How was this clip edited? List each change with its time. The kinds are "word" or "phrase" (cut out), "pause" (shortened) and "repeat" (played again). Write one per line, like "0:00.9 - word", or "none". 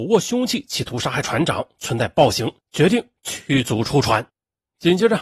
0:04.3 - pause